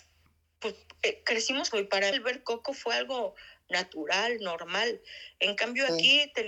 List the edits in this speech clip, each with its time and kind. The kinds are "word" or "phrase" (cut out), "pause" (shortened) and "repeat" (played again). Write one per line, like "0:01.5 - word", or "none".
0:01.7 - phrase
0:02.1 - word